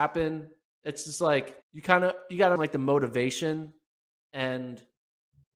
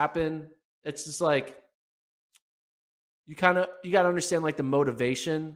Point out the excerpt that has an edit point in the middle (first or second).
first